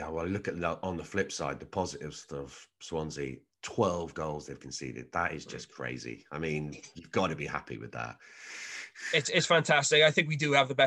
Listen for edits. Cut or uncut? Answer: uncut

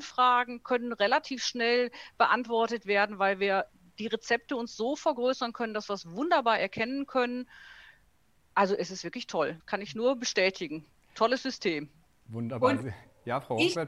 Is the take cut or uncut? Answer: cut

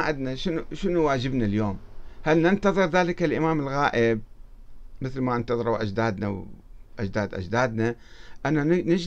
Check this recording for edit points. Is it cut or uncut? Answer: uncut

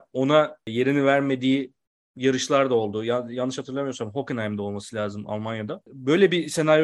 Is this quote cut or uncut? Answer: uncut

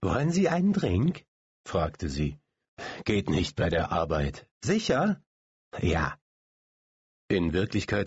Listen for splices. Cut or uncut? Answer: cut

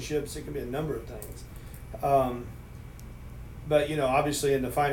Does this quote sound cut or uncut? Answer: cut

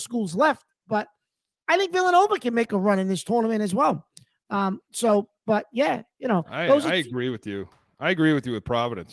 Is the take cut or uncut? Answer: uncut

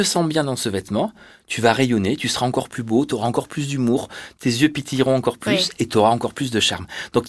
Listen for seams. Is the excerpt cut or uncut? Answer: uncut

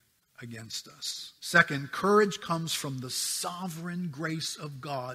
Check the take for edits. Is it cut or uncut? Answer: cut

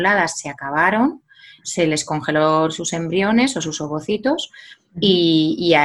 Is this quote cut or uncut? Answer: uncut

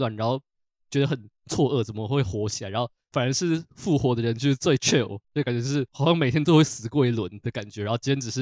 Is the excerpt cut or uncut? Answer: cut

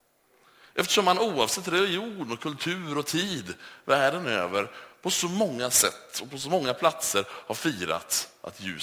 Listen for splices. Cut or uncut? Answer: uncut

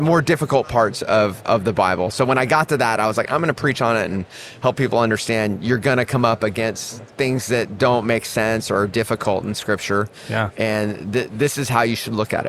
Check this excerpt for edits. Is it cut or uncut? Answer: cut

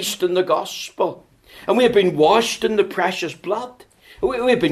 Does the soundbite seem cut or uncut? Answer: uncut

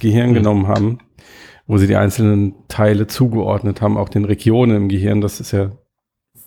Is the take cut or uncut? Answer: uncut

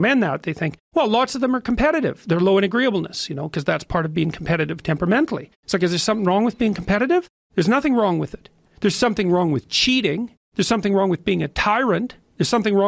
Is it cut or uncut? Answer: uncut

